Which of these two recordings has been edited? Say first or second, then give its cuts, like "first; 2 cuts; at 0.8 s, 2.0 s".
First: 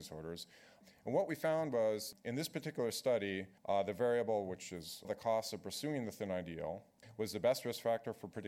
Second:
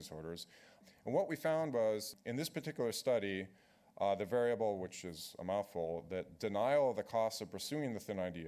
first; 2 cuts; at 3.6 s, 5.0 s